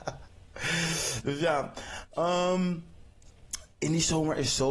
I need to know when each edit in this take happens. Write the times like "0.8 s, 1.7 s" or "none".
3.7 s